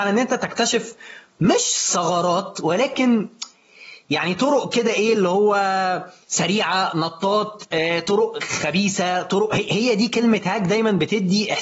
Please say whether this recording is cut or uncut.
uncut